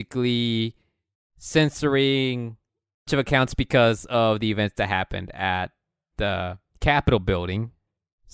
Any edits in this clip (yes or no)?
yes